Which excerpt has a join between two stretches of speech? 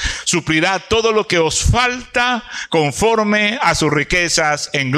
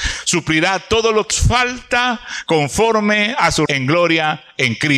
second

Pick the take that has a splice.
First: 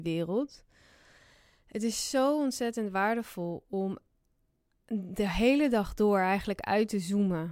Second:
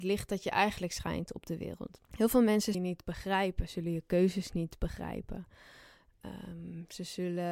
second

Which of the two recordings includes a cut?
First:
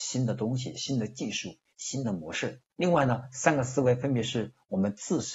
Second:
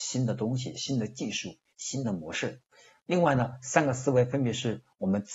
first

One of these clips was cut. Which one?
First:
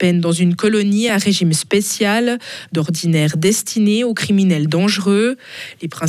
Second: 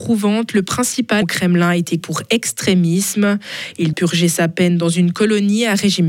second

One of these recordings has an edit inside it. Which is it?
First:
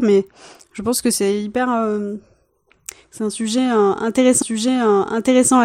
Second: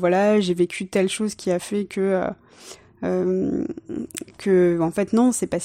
first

